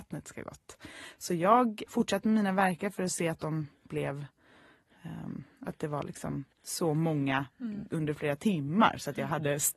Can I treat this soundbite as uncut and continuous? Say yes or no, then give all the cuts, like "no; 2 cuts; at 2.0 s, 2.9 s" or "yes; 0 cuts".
no; 2 cuts; at 1.9 s, 6.5 s